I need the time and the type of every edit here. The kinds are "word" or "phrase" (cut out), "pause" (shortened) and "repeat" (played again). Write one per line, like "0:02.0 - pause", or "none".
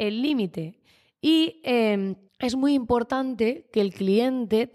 0:02.3 - pause